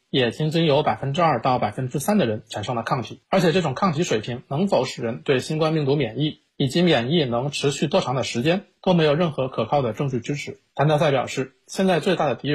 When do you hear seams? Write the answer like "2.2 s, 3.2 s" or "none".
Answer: none